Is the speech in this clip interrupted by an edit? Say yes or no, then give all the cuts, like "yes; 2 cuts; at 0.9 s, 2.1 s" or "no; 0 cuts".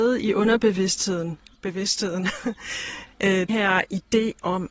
yes; 2 cuts; at 1.5 s, 3.5 s